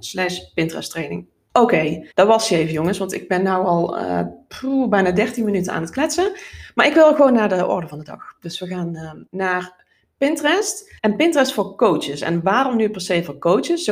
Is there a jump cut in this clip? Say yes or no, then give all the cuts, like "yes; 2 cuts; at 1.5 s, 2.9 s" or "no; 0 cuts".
yes; 3 cuts; at 2.1 s, 9.3 s, 11.0 s